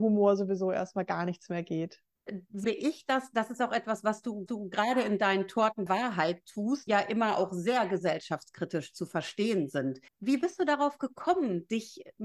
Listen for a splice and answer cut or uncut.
cut